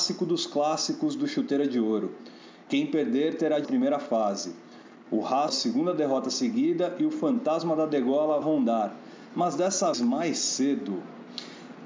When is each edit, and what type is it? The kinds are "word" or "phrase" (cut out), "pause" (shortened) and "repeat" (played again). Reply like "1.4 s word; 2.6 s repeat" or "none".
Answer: 3.6 s phrase; 5.5 s word; 8.4 s phrase; 9.9 s word